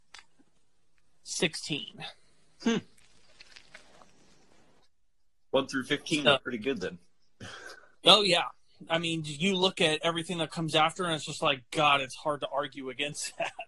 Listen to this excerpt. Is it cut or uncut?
uncut